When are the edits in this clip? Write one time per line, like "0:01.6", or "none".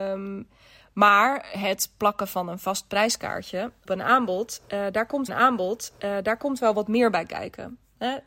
0:03.9
0:05.3

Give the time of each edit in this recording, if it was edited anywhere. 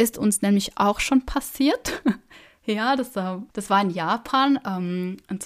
0:03.5

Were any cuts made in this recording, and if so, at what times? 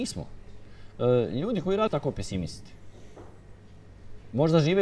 0:01.9

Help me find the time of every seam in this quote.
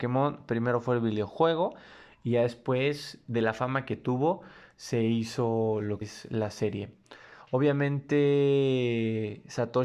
0:06.0

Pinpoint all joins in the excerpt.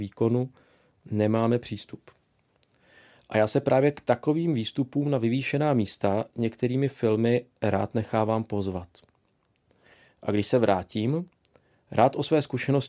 none

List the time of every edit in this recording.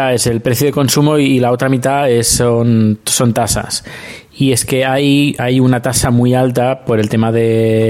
0:05.4

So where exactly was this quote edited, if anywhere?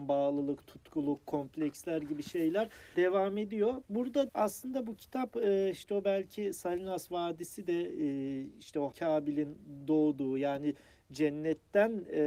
0:02.9
0:04.3
0:08.9

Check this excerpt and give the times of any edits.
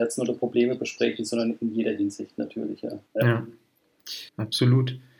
0:03.1
0:04.3

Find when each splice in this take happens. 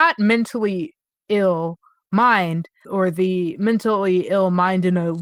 none

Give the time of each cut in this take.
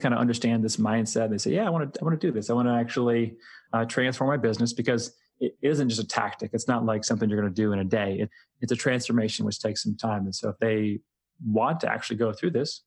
none

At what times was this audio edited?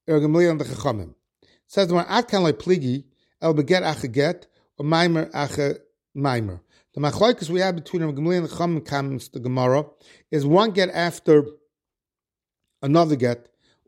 none

